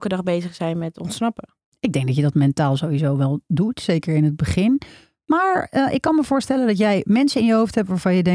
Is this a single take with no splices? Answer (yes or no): yes